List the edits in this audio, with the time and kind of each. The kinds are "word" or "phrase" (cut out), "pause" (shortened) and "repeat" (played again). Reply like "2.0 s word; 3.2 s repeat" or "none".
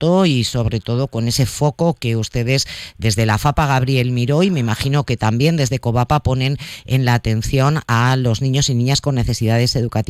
none